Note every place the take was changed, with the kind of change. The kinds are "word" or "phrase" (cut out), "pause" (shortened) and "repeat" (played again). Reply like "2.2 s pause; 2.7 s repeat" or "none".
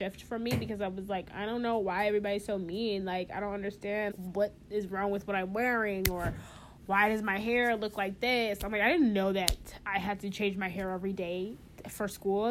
4.1 s word